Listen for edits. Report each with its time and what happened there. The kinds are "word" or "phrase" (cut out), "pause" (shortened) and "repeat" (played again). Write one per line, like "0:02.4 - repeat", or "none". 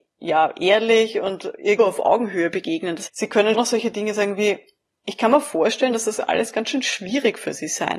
0:01.8 - word
0:03.1 - word
0:03.5 - word